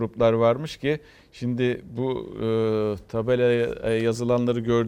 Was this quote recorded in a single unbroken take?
yes; 0 cuts

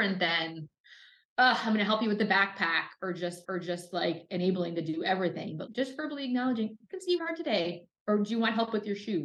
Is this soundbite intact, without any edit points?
no; 3 cuts; at 3.4 s, 5.7 s, 7.2 s

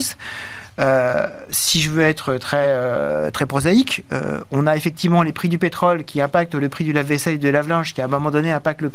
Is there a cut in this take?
no; 0 cuts

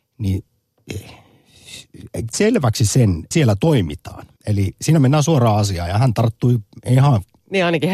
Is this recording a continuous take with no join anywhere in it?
no; 3 cuts; at 2.3 s, 3.3 s, 4.4 s

